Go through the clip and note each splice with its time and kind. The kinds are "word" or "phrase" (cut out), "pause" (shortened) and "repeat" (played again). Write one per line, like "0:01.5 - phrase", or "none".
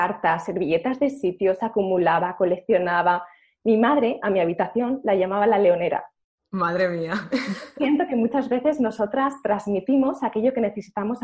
none